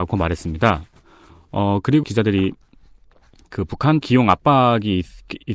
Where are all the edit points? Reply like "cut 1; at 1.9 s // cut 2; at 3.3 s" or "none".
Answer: cut 1; at 2.0 s // cut 2; at 4.0 s